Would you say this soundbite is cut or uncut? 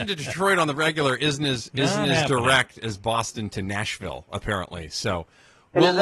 uncut